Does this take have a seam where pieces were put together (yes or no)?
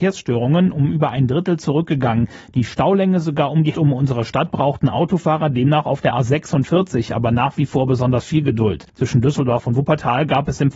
yes